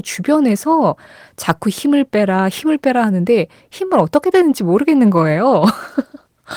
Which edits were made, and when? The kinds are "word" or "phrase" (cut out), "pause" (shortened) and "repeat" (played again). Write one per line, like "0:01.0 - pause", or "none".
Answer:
0:04.3 - word